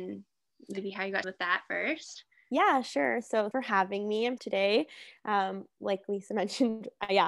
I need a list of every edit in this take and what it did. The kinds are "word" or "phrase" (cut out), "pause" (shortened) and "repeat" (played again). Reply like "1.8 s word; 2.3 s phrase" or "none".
1.2 s word; 3.5 s word; 4.4 s phrase